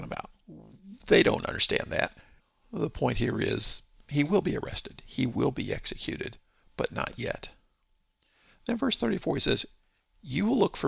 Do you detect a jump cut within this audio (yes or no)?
no